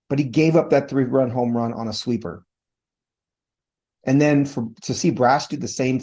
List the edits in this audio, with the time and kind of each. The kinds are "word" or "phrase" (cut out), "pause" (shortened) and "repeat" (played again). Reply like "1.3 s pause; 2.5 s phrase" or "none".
none

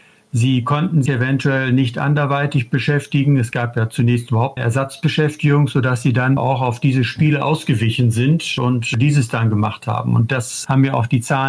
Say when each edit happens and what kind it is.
1.1 s word; 4.6 s word; 6.4 s word

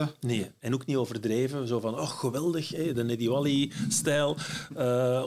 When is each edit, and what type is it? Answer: none

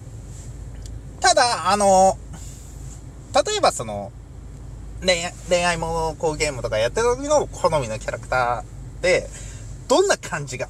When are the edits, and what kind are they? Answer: none

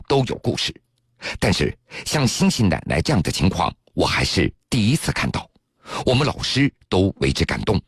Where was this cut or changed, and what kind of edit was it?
none

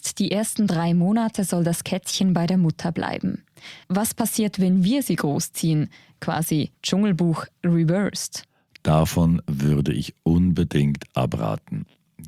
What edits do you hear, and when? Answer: 3.8 s pause; 6.7 s pause

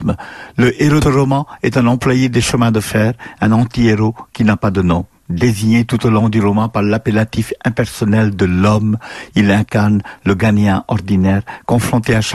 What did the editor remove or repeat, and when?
1.0 s phrase

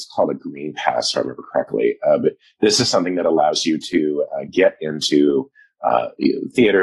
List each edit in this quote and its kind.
none

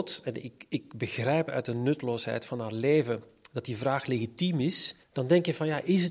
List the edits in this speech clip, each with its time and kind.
5.0 s pause

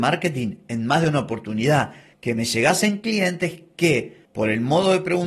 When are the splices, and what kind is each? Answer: none

